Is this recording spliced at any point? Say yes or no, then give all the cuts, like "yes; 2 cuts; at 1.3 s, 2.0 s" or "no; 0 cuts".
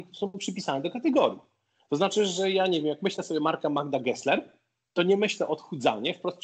no; 0 cuts